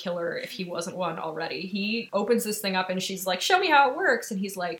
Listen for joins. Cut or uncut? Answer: uncut